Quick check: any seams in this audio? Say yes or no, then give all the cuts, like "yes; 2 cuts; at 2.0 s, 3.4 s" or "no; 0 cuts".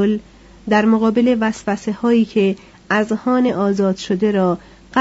no; 0 cuts